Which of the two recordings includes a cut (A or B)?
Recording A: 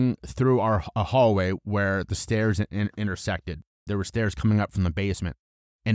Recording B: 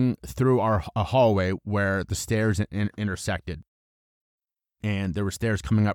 A